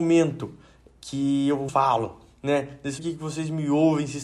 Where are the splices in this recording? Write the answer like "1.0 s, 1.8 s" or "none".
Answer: 1.7 s, 3.0 s